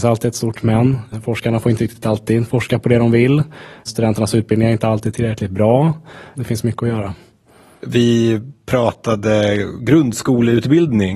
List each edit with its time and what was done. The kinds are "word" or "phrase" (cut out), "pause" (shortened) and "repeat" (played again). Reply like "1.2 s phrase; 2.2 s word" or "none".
none